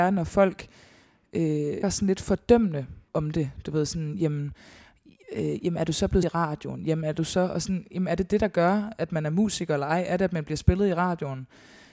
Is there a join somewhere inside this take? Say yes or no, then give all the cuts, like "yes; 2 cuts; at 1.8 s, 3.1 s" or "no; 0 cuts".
yes; 3 cuts; at 1.8 s, 3.1 s, 6.2 s